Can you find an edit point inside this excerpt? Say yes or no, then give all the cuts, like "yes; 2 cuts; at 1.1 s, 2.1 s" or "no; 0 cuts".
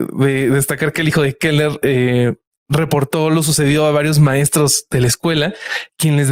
no; 0 cuts